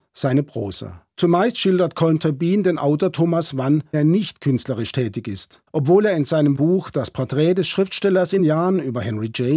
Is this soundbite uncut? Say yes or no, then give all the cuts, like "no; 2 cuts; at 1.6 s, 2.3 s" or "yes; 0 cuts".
no; 5 cuts; at 1.1 s, 3.9 s, 5.7 s, 6.6 s, 8.4 s